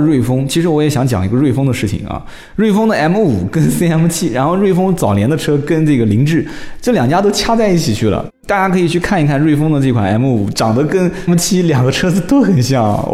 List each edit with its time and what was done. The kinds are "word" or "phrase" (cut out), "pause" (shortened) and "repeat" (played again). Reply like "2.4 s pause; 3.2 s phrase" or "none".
11.3 s phrase